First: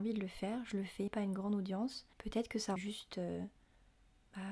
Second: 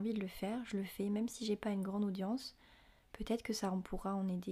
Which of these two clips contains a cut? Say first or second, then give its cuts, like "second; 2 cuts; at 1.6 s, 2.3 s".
first; 3 cuts; at 1.1 s, 2.1 s, 2.8 s